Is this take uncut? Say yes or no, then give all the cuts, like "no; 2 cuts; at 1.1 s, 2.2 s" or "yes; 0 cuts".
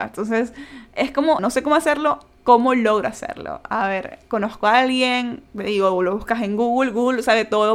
no; 3 cuts; at 1.4 s, 2.4 s, 5.5 s